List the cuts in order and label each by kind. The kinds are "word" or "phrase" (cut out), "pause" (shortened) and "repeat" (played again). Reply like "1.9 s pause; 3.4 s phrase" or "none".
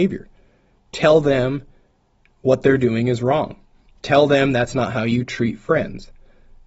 none